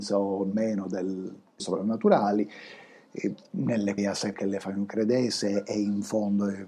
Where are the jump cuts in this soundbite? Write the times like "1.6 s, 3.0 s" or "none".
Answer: 1.6 s, 4.0 s, 4.3 s